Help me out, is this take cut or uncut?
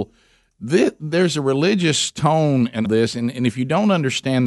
cut